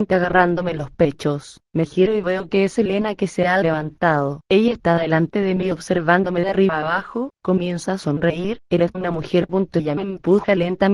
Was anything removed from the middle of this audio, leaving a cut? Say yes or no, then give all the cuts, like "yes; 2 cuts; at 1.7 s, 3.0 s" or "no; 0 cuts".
yes; 3 cuts; at 1.7 s, 4.4 s, 8.9 s